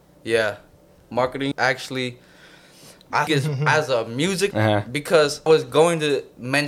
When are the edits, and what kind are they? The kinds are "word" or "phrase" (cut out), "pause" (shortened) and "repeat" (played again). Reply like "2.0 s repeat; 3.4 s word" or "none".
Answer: 1.5 s word; 3.3 s word; 4.5 s word; 5.5 s word